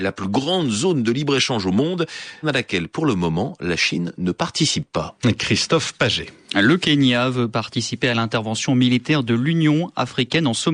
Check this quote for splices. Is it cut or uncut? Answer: cut